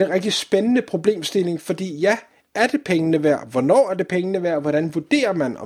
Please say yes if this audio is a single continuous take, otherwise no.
yes